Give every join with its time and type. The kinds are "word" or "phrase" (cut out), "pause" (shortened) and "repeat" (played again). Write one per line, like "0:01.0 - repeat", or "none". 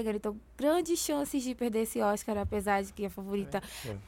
none